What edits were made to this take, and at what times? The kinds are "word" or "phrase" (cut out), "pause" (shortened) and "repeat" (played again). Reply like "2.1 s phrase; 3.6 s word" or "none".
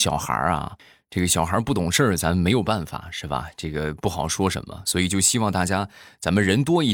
none